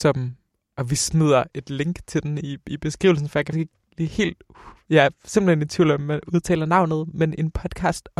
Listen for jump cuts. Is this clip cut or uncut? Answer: cut